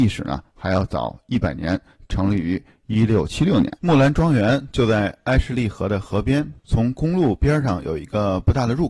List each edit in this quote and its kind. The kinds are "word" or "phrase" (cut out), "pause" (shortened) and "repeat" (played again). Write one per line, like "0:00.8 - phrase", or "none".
0:03.8 - pause
0:06.6 - pause